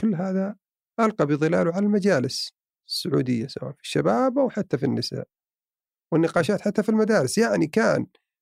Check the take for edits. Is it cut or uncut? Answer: uncut